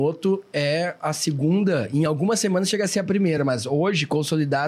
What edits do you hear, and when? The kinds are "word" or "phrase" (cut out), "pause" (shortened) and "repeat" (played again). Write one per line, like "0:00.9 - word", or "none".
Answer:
none